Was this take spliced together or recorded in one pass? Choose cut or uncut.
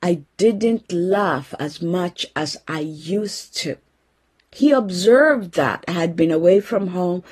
uncut